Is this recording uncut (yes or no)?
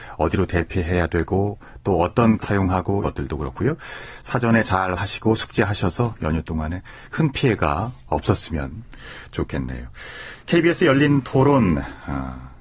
no